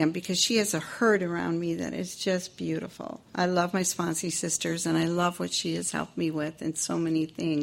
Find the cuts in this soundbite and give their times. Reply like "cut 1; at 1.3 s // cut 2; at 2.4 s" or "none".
cut 1; at 3.3 s